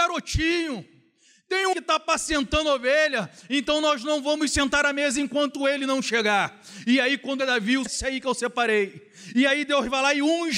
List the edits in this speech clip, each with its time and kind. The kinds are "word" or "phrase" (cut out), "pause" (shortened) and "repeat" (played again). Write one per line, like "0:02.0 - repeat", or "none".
0:01.7 - phrase
0:07.4 - word
0:07.9 - phrase

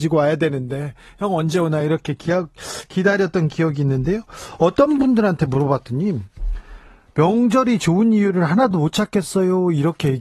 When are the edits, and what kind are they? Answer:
none

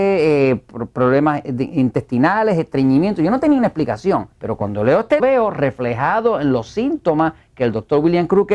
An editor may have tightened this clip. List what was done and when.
0:04.3 - pause
0:05.2 - phrase

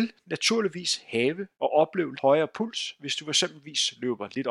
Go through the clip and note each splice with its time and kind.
0:01.5 - pause
0:02.2 - word

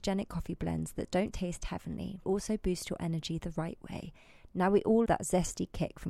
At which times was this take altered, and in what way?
0:01.3 - word
0:02.2 - phrase
0:05.1 - word

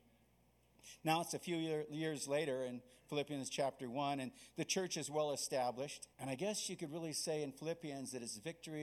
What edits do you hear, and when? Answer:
0:06.1 - pause

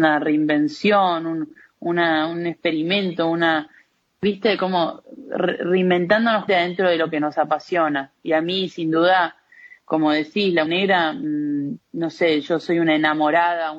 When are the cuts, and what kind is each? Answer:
0:06.5 - word
0:10.7 - word

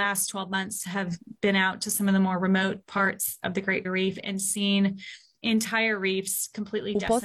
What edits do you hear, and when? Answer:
0:03.8 - word

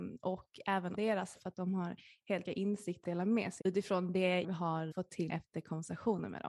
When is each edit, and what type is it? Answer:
0:00.9 - word
0:01.3 - word
0:02.4 - word
0:03.0 - word
0:03.6 - word
0:04.4 - word
0:04.9 - word
0:05.3 - word

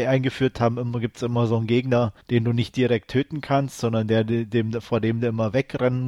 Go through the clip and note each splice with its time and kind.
0:02.2 - pause

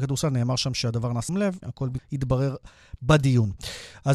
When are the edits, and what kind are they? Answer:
0:01.3 - word
0:01.6 - word
0:02.0 - word

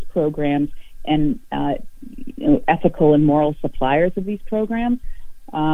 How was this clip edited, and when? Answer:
none

